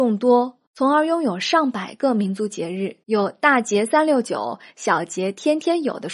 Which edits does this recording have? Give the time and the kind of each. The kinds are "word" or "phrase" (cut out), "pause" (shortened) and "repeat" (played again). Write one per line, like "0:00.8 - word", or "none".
0:03.0 - pause